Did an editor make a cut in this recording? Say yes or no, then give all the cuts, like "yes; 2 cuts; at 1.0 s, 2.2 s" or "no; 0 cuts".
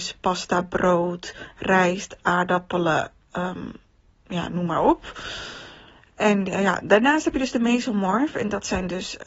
no; 0 cuts